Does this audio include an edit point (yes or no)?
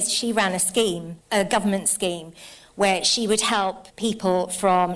yes